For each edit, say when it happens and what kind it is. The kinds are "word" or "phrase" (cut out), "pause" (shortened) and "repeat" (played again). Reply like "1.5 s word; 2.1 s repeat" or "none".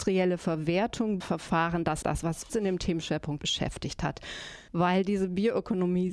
1.2 s word; 2.0 s word; 2.5 s word; 3.4 s word; 4.7 s pause

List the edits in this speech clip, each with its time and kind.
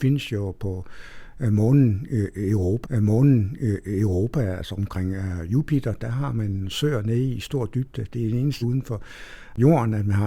2.8 s repeat; 8.6 s word

